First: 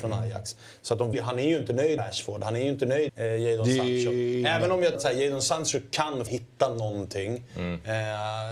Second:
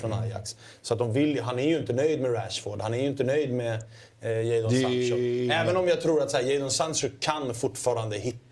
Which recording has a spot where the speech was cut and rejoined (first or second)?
first